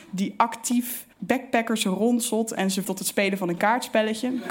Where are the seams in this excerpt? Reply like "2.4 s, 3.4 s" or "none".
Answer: 1.1 s, 2.8 s